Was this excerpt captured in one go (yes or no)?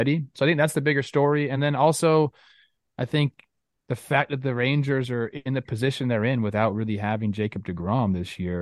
yes